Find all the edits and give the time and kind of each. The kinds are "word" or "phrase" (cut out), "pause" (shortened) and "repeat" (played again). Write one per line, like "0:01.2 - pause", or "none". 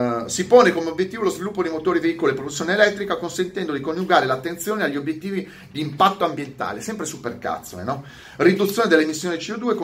none